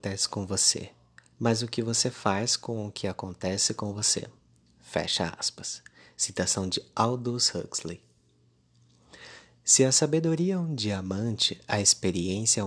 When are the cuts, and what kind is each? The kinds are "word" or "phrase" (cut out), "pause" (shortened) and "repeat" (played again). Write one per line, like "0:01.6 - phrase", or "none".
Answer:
none